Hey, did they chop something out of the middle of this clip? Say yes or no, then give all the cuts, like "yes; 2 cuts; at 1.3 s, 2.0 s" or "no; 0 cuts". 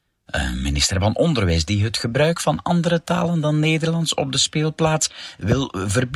no; 0 cuts